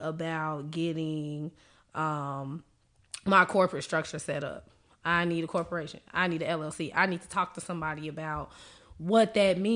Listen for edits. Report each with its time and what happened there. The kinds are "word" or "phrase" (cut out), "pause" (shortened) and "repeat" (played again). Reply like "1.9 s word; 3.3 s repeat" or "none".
none